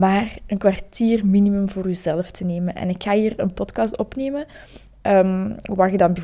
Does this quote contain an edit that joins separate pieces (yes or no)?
no